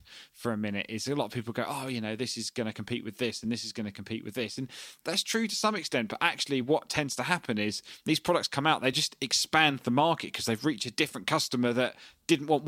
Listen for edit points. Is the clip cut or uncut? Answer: uncut